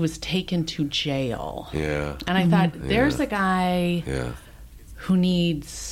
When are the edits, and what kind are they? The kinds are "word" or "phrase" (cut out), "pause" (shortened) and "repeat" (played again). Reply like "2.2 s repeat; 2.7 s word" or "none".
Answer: none